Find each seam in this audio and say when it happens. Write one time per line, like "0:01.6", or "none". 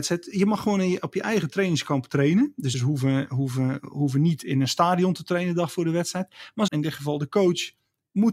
0:02.7
0:06.7